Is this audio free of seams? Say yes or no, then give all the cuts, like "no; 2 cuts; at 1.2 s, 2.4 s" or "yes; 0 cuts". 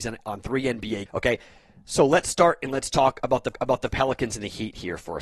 no; 2 cuts; at 1.1 s, 3.5 s